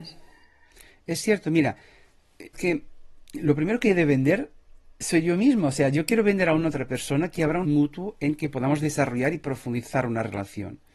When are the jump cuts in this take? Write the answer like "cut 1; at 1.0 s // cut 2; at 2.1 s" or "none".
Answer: cut 1; at 2.5 s // cut 2; at 7.6 s